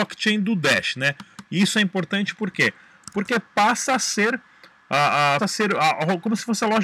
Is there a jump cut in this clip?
yes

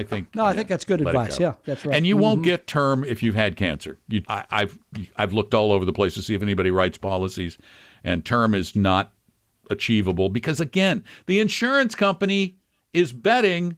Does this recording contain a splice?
yes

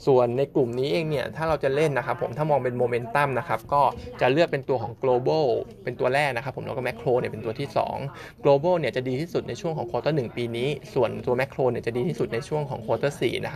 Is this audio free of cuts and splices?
yes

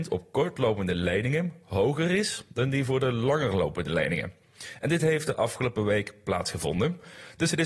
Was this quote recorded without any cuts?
yes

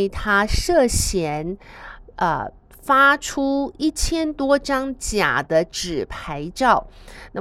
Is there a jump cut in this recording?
no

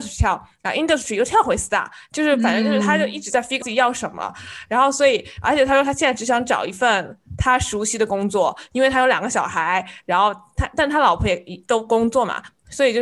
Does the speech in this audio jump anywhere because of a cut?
yes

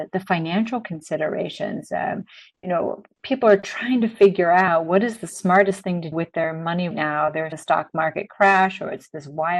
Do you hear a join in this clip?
yes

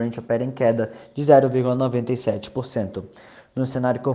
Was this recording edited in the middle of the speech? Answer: no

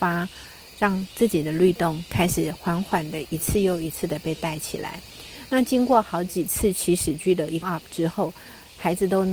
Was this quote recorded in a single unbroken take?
no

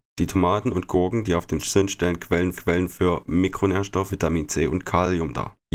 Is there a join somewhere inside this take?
yes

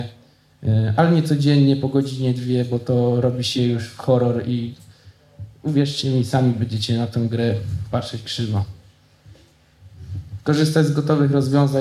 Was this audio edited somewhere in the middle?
no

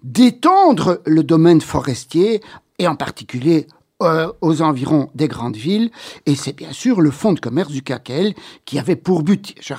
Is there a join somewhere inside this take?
no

